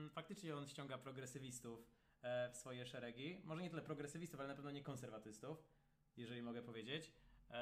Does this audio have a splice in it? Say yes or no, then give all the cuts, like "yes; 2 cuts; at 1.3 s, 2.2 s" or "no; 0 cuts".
no; 0 cuts